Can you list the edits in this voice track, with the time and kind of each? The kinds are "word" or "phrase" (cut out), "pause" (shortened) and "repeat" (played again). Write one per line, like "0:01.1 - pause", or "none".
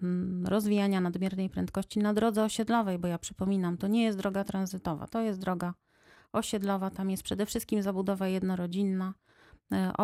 none